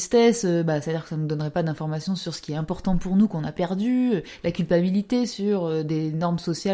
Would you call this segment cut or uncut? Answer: uncut